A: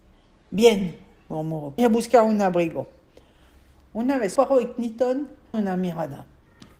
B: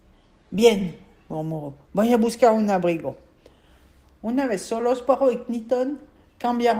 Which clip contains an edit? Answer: A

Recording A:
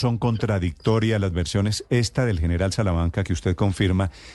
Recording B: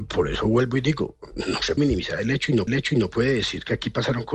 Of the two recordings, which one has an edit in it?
B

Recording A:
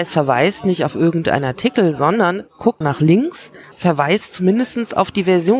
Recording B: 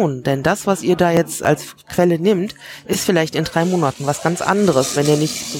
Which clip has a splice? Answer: A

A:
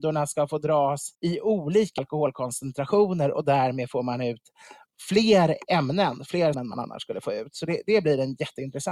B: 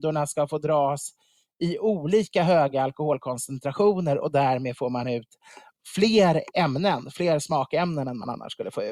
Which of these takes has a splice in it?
A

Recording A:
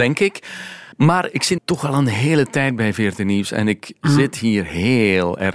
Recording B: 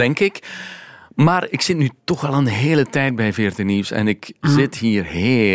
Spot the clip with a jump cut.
A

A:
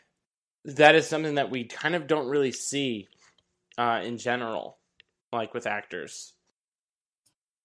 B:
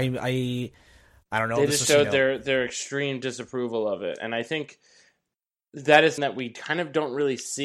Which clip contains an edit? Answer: B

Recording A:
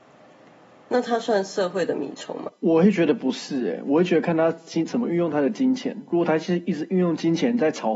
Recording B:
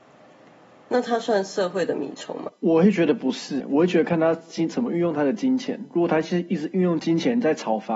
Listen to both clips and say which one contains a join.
B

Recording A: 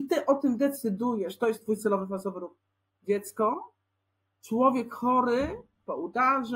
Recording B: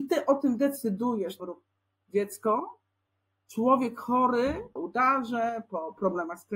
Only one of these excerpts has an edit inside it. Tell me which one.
B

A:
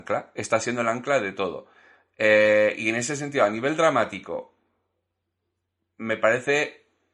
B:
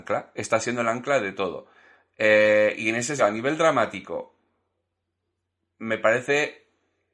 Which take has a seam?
B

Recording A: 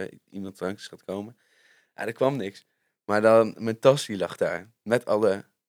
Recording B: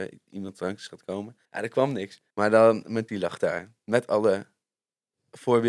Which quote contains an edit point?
B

